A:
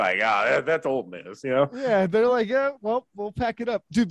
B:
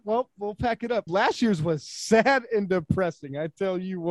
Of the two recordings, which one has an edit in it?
B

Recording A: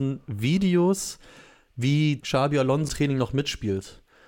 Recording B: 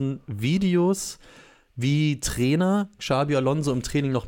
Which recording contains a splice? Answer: A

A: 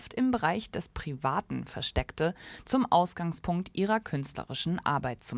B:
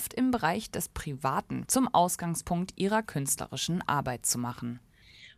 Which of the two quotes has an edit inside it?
B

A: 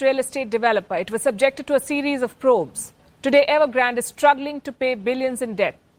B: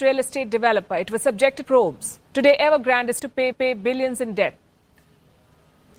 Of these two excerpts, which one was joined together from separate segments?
B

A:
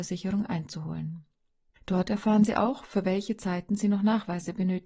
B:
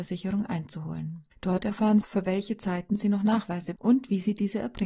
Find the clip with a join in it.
B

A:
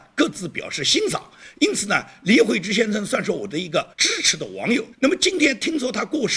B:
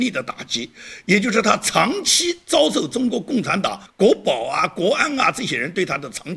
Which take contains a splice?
A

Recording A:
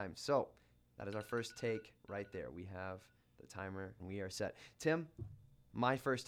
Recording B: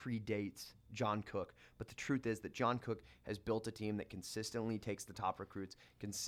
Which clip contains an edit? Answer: A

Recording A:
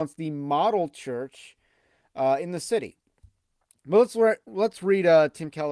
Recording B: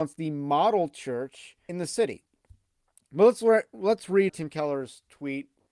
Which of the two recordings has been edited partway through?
B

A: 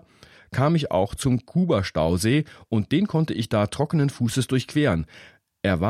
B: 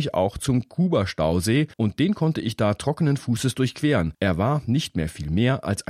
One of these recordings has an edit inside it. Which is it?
B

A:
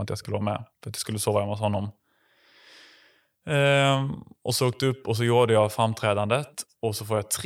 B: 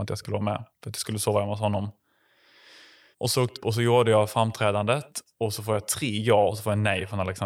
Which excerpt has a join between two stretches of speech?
B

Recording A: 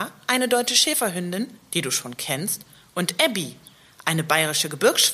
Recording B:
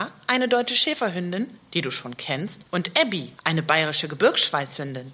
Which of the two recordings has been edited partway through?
B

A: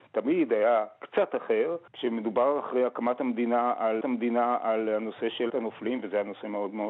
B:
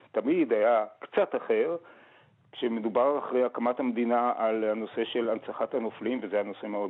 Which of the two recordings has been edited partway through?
A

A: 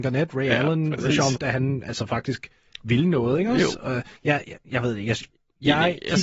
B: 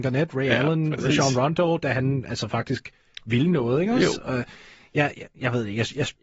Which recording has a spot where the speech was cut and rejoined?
A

